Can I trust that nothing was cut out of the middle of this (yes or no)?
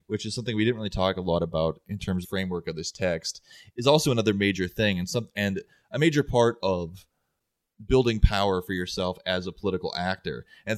no